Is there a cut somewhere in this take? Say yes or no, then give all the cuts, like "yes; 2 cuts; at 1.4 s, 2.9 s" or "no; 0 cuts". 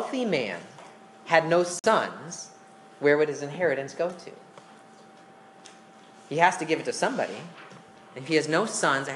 no; 0 cuts